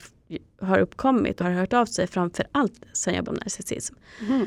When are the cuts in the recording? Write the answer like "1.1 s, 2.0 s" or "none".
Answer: 1.4 s, 3.2 s